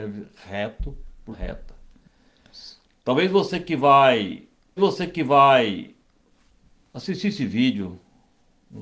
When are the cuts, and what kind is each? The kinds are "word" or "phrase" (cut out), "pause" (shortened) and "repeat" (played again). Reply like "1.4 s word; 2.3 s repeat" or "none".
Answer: 1.3 s word; 4.8 s repeat

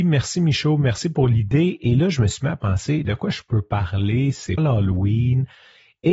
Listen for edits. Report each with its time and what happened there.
3.0 s word; 4.6 s word

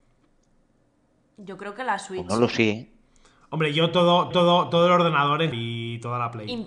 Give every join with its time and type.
4.3 s repeat; 5.5 s word

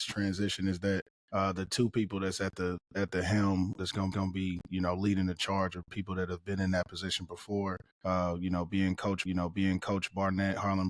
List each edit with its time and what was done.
1.1 s pause; 3.8 s word; 4.1 s repeat; 7.9 s pause; 9.3 s repeat

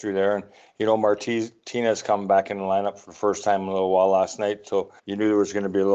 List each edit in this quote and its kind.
5.0 s pause

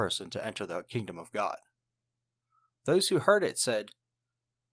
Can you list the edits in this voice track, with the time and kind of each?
none

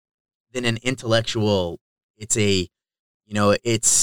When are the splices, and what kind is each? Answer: 2.1 s word

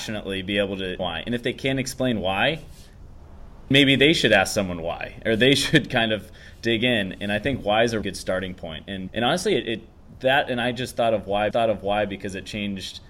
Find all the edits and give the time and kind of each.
1.0 s phrase; 3.7 s word; 8.0 s word; 9.1 s word; 11.5 s repeat

